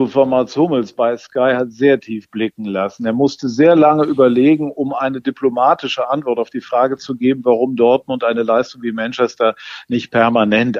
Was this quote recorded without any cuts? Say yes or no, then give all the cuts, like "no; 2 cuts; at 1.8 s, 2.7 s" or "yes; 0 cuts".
yes; 0 cuts